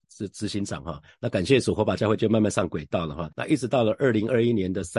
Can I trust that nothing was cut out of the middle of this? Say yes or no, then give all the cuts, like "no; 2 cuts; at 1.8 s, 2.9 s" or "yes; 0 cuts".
no; 1 cut; at 3.3 s